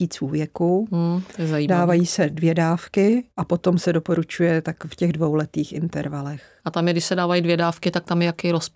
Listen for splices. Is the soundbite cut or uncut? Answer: cut